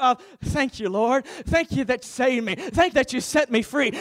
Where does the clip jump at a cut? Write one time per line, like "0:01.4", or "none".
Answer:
0:02.0
0:02.9

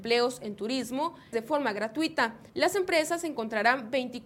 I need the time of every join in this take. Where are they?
0:01.3
0:02.5

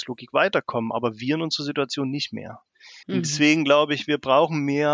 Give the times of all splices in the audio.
0:03.0

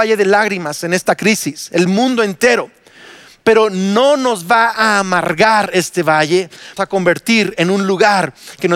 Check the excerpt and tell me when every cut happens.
0:06.8

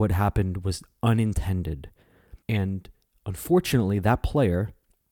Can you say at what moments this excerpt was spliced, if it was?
0:02.4

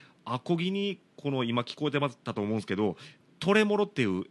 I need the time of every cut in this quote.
0:01.1
0:02.2

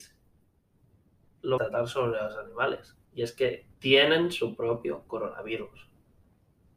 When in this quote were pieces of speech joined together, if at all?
0:01.6
0:03.0
0:03.7

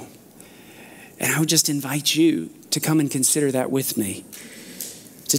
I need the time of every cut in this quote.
none

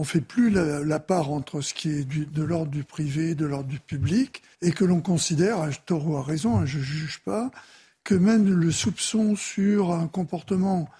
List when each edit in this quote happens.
0:04.5

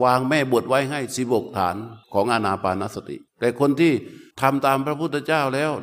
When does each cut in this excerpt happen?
0:02.0
0:03.3
0:04.3

